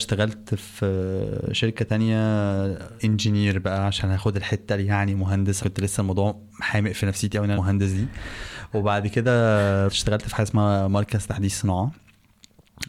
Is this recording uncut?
no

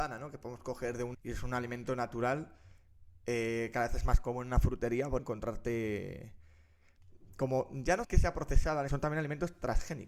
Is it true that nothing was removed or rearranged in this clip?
no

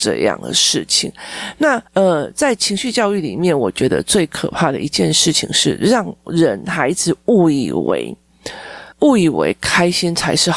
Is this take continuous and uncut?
no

